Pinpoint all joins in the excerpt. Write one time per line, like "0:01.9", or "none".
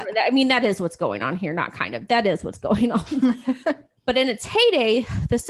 0:04.0